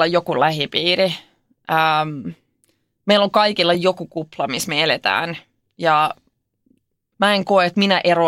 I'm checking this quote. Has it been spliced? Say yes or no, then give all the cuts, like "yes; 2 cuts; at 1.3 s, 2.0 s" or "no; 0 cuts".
no; 0 cuts